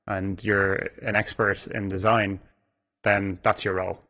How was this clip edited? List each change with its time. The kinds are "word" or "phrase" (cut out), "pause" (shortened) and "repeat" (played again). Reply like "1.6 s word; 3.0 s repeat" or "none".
none